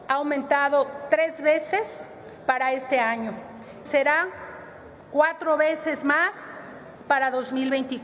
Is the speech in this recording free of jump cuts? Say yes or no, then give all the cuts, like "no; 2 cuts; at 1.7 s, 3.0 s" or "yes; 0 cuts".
no; 1 cut; at 3.9 s